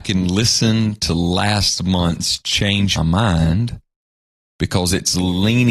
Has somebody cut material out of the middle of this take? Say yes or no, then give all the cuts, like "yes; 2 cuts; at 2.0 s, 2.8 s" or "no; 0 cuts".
yes; 1 cut; at 3.0 s